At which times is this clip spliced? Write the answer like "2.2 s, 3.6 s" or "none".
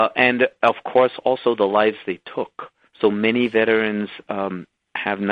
2.8 s